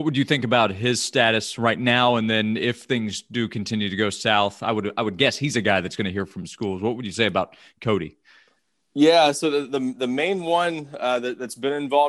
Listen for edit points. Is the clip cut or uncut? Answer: uncut